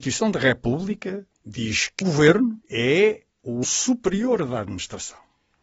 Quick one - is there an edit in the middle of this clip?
yes; 4 cuts; at 1.3 s, 2.0 s, 2.6 s, 3.6 s

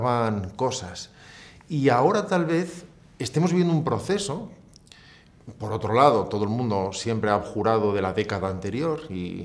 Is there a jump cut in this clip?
no; 0 cuts

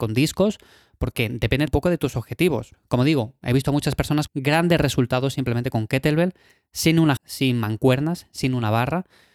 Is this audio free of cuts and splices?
no; 3 cuts; at 1.7 s, 4.3 s, 7.2 s

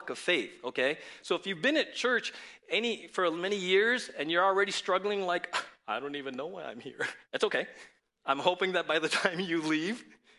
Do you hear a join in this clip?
yes; 2 cuts; at 7.2 s, 8.0 s

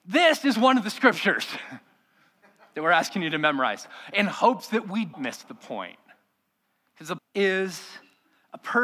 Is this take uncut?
no; 2 cuts; at 5.1 s, 7.2 s

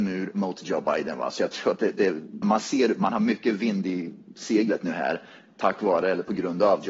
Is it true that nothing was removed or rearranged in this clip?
no; 1 cut; at 2.4 s

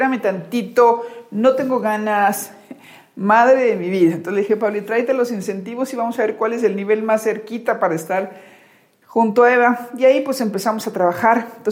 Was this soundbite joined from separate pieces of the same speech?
no; 0 cuts

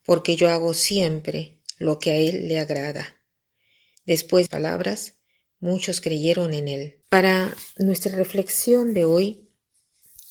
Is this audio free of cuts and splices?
no; 2 cuts; at 4.5 s, 7.0 s

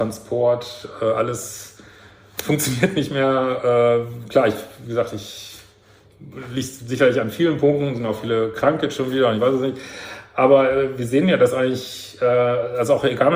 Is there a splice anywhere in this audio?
no; 0 cuts

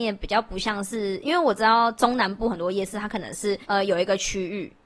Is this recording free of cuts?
no; 1 cut; at 3.6 s

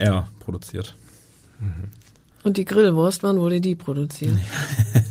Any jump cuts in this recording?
no; 0 cuts

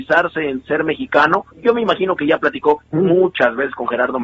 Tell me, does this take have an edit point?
yes; 1 cut; at 1.5 s

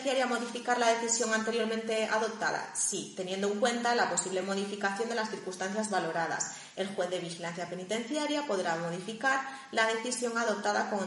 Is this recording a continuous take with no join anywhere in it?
yes; 0 cuts

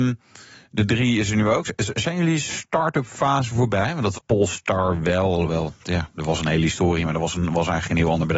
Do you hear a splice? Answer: yes; 1 cut; at 4.1 s

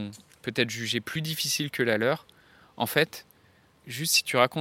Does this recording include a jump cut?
no; 0 cuts

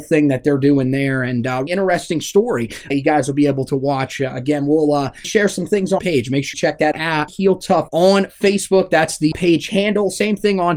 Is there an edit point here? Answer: yes; 9 cuts; at 1.7 s, 2.9 s, 5.2 s, 6.0 s, 6.5 s, 6.9 s, 7.3 s, 7.9 s, 9.3 s

